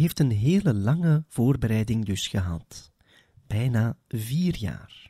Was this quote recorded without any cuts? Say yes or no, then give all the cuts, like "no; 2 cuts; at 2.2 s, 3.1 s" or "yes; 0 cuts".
yes; 0 cuts